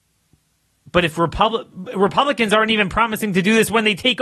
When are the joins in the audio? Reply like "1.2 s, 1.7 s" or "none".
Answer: none

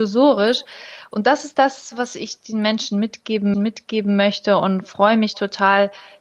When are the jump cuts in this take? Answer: 3.5 s

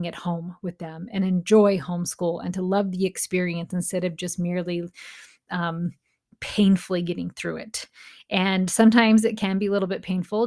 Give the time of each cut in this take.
none

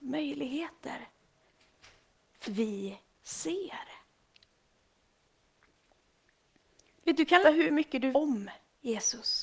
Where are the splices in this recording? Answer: 2.4 s, 3.1 s, 7.4 s, 8.1 s

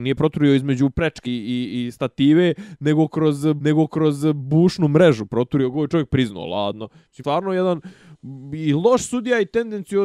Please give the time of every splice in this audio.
1.2 s, 3.6 s, 7.2 s

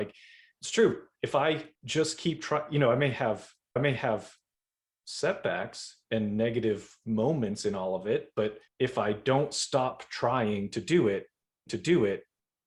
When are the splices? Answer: 1.7 s, 3.8 s, 8.7 s, 11.7 s

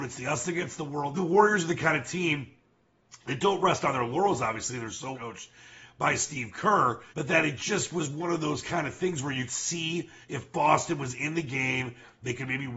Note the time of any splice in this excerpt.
1.1 s, 5.1 s, 7.1 s, 9.5 s, 10.2 s

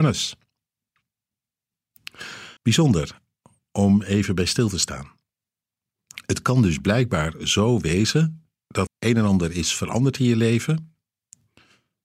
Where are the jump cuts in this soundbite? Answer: 2.6 s, 8.9 s

